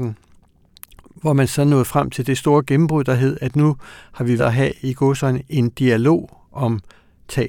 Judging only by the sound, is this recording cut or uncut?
cut